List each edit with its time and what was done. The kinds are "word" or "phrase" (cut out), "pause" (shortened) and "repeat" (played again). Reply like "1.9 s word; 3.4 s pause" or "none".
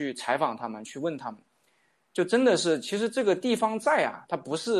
none